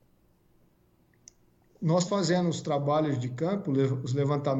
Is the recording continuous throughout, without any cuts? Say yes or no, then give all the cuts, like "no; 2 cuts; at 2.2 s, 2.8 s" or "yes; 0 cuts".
no; 1 cut; at 2.1 s